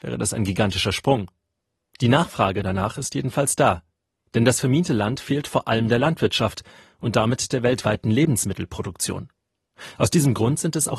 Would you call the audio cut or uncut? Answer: uncut